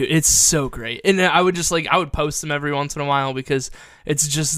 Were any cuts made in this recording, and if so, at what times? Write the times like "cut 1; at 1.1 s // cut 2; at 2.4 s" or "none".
none